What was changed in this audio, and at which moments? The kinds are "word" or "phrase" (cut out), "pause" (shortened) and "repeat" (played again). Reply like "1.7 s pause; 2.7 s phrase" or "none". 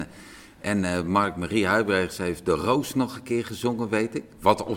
none